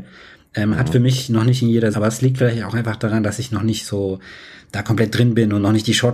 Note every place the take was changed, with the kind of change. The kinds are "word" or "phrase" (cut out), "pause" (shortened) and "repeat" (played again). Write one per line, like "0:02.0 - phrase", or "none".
0:01.9 - phrase